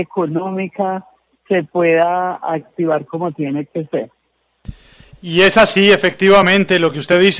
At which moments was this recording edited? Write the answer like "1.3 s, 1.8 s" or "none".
none